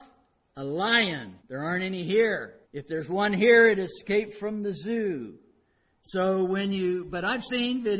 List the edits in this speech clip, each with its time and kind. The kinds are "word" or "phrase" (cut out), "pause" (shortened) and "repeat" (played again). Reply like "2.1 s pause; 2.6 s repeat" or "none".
1.4 s pause; 2.6 s pause